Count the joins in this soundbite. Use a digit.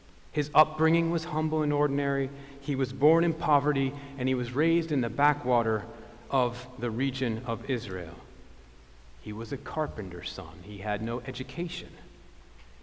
0